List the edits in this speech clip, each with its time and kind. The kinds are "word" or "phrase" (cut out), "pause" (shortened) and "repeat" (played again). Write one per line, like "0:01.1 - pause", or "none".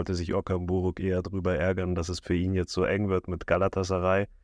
none